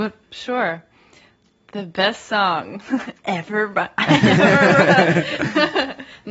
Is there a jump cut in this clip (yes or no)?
no